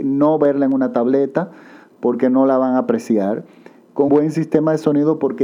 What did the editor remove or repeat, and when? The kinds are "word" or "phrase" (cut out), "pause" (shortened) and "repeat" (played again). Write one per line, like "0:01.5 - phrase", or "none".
0:04.1 - word